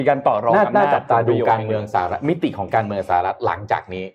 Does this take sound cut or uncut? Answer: uncut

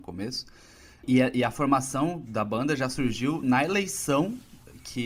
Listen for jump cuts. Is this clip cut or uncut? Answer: uncut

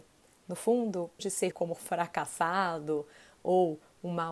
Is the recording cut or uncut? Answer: cut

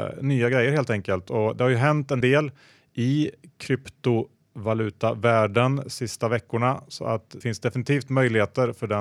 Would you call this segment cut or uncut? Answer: cut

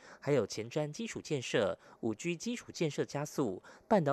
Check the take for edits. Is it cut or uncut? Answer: uncut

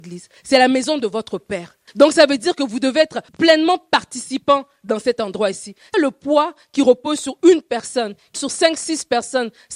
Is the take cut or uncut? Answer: cut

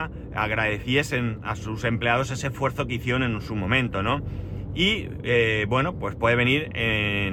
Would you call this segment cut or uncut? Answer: uncut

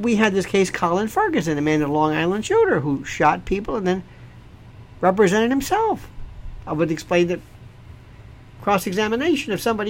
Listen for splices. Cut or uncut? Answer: uncut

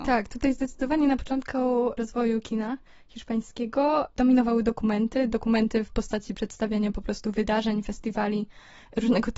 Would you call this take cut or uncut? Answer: uncut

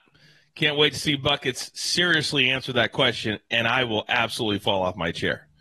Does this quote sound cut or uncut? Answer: uncut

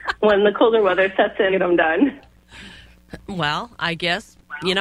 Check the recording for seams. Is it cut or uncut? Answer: cut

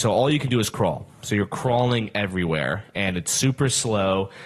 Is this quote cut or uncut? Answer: uncut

